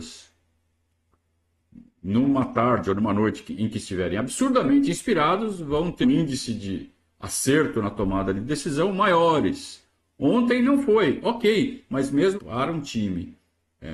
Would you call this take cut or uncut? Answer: cut